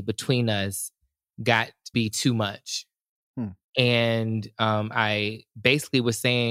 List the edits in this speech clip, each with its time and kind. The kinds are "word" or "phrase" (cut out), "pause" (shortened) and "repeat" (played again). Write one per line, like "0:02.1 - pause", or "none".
0:01.9 - word